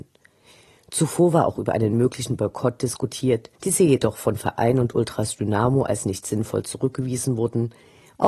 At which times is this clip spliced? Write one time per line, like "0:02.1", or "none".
0:03.5